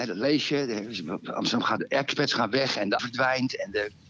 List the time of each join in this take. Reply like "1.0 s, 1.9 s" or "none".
1.8 s, 3.0 s

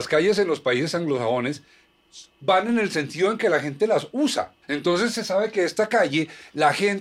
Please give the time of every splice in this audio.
4.6 s

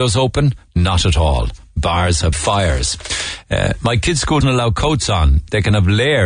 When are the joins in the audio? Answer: 2.3 s, 4.4 s

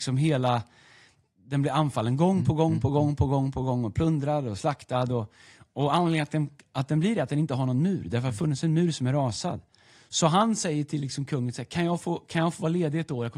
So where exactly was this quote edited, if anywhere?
none

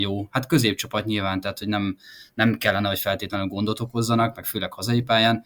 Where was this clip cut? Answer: none

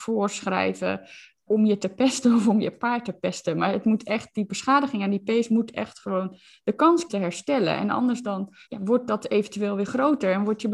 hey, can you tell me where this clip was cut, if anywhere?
1.5 s, 7.1 s, 8.6 s

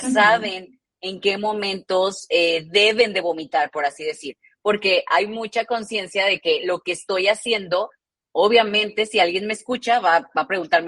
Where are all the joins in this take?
none

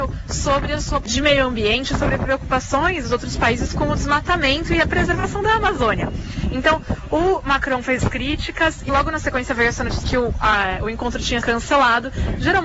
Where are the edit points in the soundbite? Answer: 1.0 s, 3.0 s, 8.0 s, 8.9 s, 10.0 s, 11.4 s

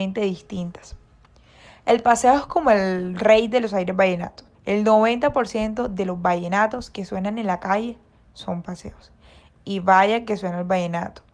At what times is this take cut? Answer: 4.5 s

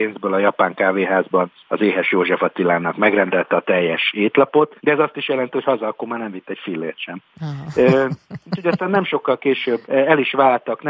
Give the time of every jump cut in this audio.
1.6 s, 4.8 s, 9.8 s

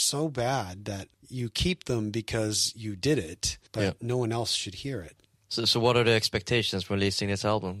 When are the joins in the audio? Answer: 1.1 s, 3.7 s, 5.4 s

